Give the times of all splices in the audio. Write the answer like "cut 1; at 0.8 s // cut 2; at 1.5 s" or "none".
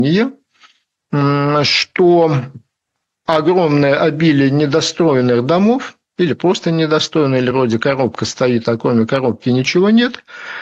none